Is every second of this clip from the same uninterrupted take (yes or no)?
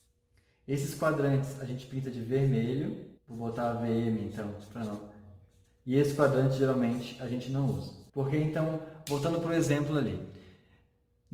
no